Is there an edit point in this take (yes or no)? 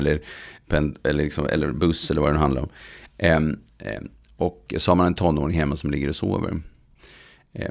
no